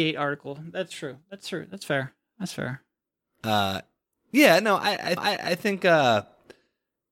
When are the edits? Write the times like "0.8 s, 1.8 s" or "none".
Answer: 5.2 s